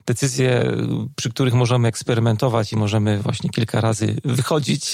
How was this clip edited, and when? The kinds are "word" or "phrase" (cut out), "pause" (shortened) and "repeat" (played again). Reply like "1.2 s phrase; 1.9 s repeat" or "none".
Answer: none